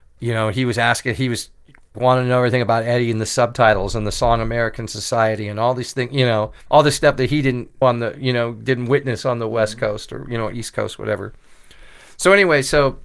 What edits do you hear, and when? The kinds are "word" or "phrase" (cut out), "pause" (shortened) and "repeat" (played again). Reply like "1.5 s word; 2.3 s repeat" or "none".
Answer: 1.9 s word; 6.6 s pause; 7.8 s word